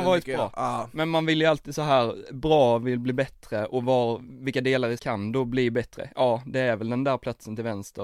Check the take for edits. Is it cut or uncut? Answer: cut